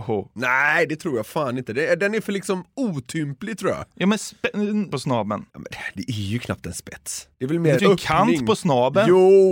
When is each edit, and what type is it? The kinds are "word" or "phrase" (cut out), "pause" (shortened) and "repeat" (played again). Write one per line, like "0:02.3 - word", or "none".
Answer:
0:04.9 - word
0:05.5 - pause
0:07.3 - pause
0:07.8 - word